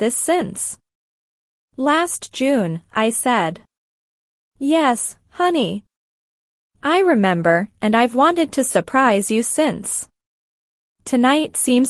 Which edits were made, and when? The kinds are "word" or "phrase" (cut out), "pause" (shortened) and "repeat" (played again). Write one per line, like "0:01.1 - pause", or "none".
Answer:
none